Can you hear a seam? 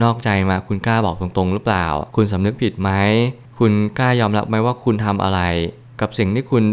yes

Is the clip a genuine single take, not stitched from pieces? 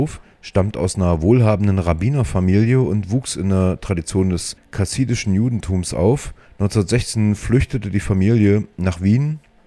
yes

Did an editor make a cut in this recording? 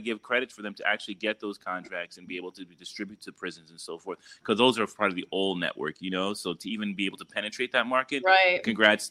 no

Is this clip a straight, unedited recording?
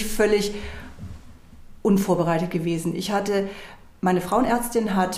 yes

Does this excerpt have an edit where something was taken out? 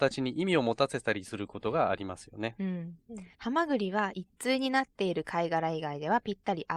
yes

